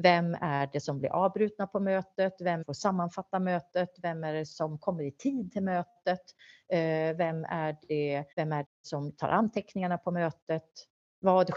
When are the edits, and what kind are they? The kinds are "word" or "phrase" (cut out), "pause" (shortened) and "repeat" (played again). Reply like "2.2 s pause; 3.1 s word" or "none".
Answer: 2.6 s phrase; 8.3 s pause; 8.6 s word